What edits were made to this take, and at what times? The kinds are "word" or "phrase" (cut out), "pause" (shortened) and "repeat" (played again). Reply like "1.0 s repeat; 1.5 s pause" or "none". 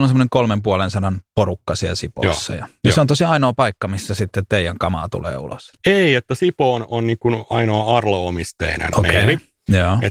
5.8 s pause